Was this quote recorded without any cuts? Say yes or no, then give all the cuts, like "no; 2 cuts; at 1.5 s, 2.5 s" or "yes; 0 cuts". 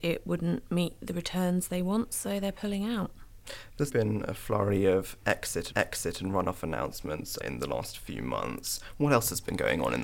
no; 3 cuts; at 3.9 s, 5.7 s, 7.4 s